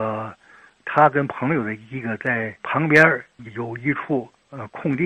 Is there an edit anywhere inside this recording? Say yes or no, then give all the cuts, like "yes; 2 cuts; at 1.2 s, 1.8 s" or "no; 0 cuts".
yes; 1 cut; at 2.6 s